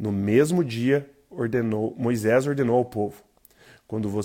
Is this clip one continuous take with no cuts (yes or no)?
yes